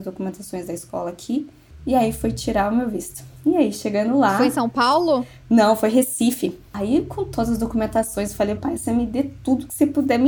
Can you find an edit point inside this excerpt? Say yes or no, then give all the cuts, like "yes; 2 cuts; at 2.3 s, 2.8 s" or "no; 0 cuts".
yes; 1 cut; at 8.6 s